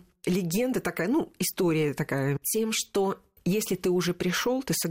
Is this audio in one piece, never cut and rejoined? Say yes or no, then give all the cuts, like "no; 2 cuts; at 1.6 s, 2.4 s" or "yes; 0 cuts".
yes; 0 cuts